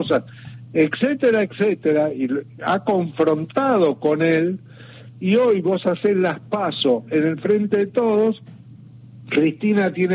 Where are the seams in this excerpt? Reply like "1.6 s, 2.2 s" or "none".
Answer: none